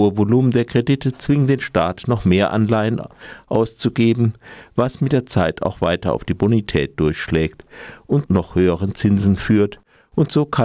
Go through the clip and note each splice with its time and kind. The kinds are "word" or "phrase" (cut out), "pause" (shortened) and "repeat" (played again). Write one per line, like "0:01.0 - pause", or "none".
0:08.3 - word